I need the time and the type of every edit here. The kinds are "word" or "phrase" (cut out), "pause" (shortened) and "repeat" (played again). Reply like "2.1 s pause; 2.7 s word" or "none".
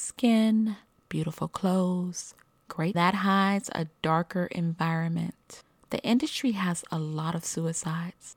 2.9 s phrase